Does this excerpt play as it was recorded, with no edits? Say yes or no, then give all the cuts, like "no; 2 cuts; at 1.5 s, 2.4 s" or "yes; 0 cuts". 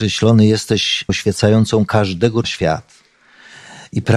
no; 2 cuts; at 1.1 s, 2.4 s